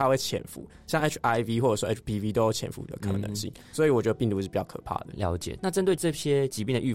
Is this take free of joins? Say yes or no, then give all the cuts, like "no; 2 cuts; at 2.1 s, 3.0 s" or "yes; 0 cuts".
yes; 0 cuts